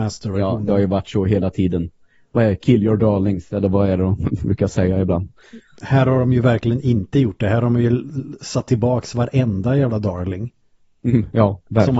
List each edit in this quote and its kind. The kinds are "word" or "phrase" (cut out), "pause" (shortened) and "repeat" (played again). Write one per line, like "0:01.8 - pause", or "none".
none